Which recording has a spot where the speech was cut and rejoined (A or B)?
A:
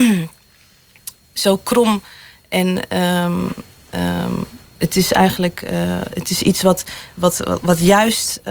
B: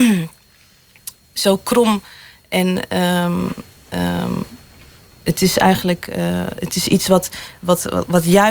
A